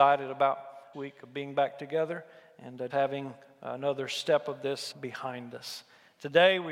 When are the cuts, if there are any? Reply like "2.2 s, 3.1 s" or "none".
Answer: 0.9 s, 2.9 s, 4.9 s